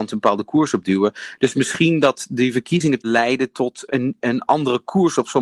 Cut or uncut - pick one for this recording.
cut